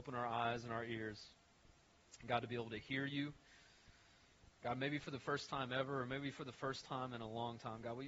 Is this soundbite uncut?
yes; 0 cuts

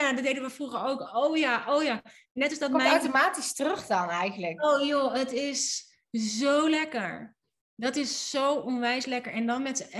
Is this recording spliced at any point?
no; 0 cuts

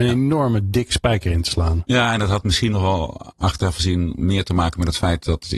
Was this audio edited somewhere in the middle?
no; 0 cuts

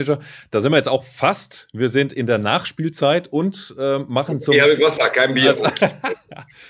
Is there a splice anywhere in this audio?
no; 0 cuts

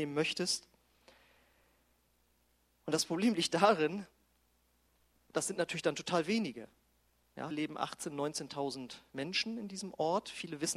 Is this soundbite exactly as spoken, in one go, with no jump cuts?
no; 1 cut; at 7.5 s

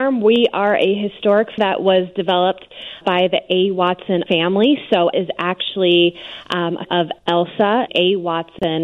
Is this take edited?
yes; 6 cuts; at 1.6 s, 3.0 s, 4.3 s, 5.1 s, 6.9 s, 7.9 s

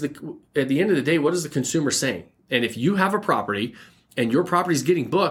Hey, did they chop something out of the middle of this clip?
no; 0 cuts

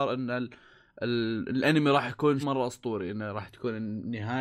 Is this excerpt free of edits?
no; 1 cut; at 2.4 s

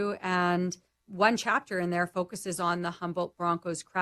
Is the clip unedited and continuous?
no; 1 cut; at 1.0 s

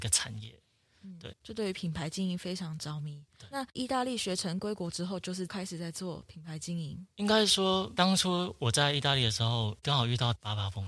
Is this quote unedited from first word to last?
no; 2 cuts; at 1.3 s, 7.1 s

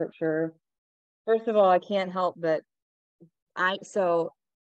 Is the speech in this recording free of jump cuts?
yes; 0 cuts

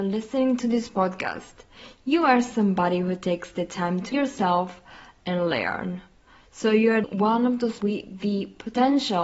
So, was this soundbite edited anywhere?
yes; 3 cuts; at 4.1 s, 7.0 s, 7.8 s

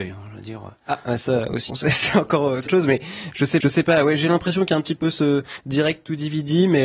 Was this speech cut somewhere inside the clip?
yes; 3 cuts; at 1.7 s, 2.7 s, 3.6 s

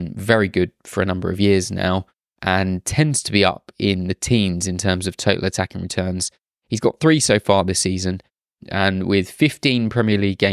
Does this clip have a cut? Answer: no; 0 cuts

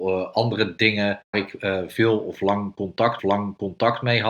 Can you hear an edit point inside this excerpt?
yes; 2 cuts; at 1.3 s, 3.2 s

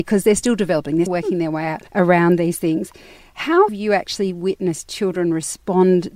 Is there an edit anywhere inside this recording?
yes; 3 cuts; at 1.1 s, 1.9 s, 3.7 s

